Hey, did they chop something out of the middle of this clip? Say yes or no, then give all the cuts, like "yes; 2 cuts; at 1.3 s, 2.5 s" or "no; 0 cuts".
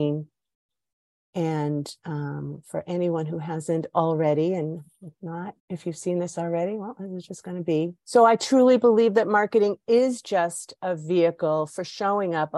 yes; 2 cuts; at 5.6 s, 8.0 s